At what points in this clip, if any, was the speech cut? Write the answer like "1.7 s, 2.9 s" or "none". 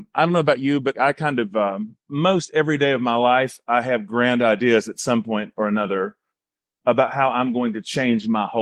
0.9 s, 2.0 s